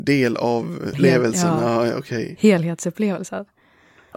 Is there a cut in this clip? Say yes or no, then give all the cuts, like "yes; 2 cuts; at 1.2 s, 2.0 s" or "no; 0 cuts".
yes; 1 cut; at 0.9 s